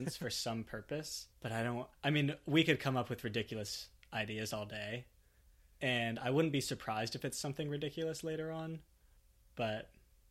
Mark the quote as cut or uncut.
cut